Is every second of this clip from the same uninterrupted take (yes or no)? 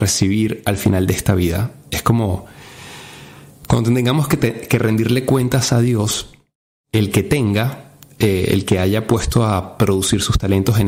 yes